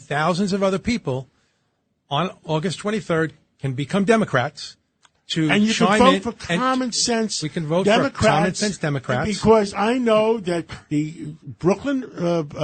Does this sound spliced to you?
no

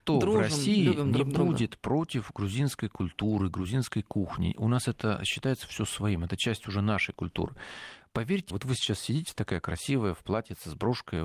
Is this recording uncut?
no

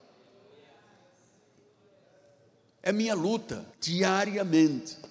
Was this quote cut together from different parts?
yes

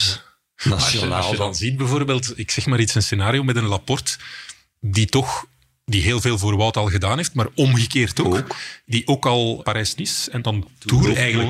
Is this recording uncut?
yes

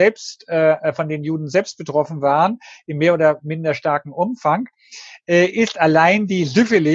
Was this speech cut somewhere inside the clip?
no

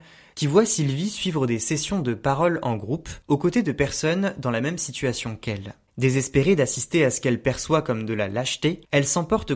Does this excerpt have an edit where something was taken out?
no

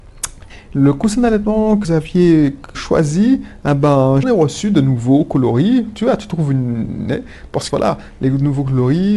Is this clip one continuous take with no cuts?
no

